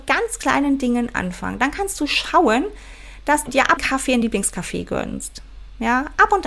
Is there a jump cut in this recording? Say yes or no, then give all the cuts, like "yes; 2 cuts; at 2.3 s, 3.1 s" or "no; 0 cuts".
yes; 3 cuts; at 3.5 s, 3.8 s, 4.2 s